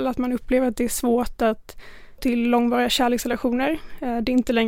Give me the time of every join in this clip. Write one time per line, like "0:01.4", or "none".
0:02.2